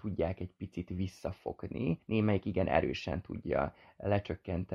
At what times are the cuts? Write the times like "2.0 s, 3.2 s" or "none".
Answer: 2.0 s